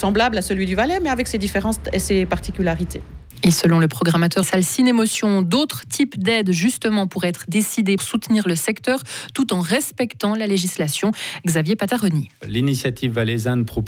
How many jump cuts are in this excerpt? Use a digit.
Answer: 2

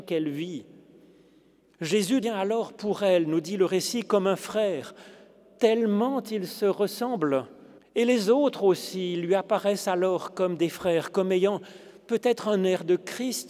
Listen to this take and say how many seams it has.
3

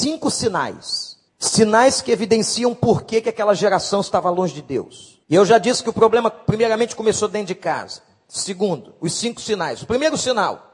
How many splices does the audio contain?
2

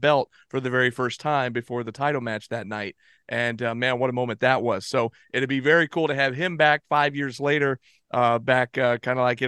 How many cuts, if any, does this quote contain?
0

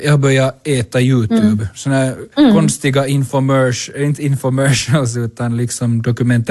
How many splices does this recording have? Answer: 1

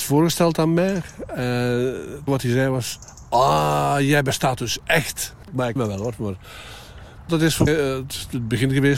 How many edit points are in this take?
4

